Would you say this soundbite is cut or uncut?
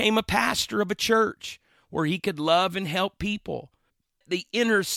uncut